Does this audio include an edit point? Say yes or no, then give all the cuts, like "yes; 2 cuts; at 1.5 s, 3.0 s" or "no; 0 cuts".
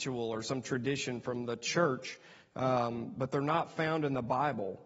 no; 0 cuts